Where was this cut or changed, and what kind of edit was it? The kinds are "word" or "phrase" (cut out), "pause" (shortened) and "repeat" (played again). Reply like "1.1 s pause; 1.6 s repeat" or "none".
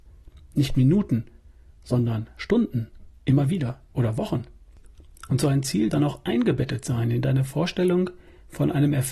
3.9 s word; 5.9 s word